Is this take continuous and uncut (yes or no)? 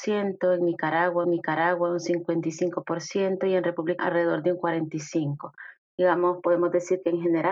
no